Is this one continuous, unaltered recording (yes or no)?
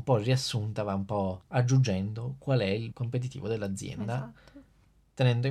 no